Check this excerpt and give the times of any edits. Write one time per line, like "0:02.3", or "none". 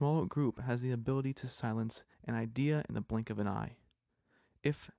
0:02.1